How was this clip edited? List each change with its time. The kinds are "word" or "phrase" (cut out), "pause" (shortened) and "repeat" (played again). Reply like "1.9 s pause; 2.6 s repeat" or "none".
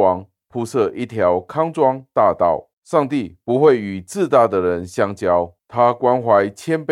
2.7 s pause; 5.6 s pause